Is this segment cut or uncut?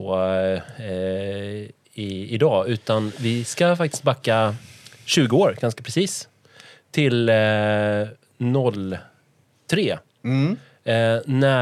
uncut